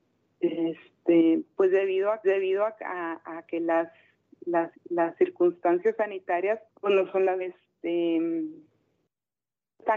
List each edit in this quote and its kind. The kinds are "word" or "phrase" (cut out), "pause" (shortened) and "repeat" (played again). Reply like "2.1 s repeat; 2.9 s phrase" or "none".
2.2 s repeat; 4.7 s repeat; 6.7 s pause; 7.4 s phrase